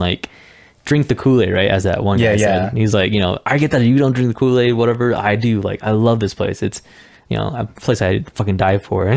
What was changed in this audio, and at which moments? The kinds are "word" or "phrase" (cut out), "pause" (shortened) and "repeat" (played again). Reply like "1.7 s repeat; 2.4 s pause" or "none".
none